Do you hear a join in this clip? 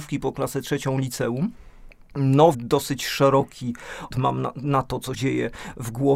yes; 3 cuts; at 2.5 s, 4.1 s, 5.1 s

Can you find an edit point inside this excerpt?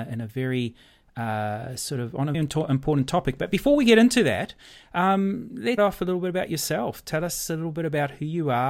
yes; 2 cuts; at 2.3 s, 5.8 s

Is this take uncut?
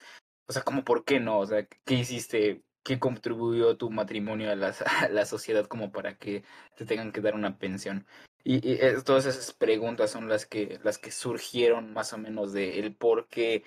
yes; 0 cuts

